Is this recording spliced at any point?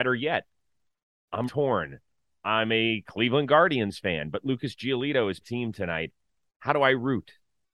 yes; 2 cuts; at 1.5 s, 5.4 s

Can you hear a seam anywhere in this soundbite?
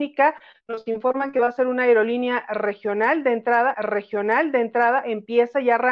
yes; 1 cut; at 3.7 s

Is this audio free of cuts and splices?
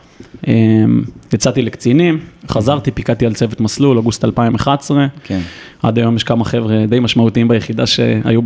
yes; 0 cuts

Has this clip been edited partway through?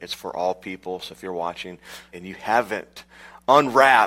yes; 1 cut; at 2.1 s

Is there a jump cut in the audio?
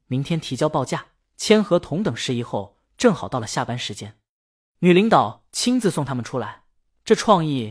no; 0 cuts

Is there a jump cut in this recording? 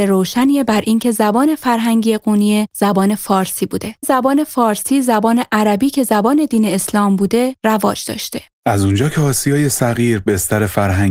yes; 1 cut; at 4.0 s

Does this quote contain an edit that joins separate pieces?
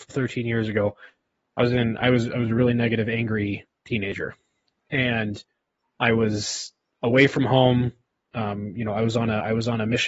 no; 0 cuts

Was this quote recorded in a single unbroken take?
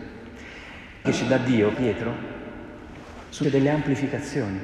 no; 3 cuts; at 1.0 s, 1.7 s, 3.4 s

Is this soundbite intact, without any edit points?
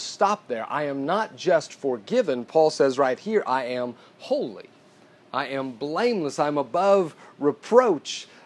yes; 0 cuts

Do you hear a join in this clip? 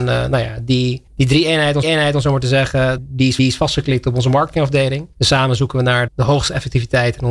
yes; 6 cuts; at 1.1 s, 1.8 s, 3.0 s, 3.4 s, 5.1 s, 6.1 s

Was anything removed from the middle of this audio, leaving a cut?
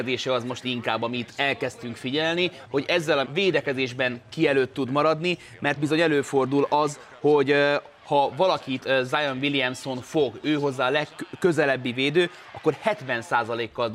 yes; 2 cuts; at 3.2 s, 5.8 s

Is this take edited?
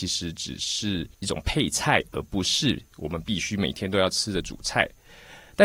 yes; 1 cut; at 1.1 s

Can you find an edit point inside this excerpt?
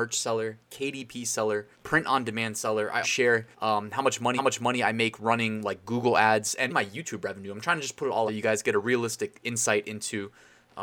yes; 6 cuts; at 1.7 s, 3.0 s, 3.5 s, 4.4 s, 6.7 s, 8.3 s

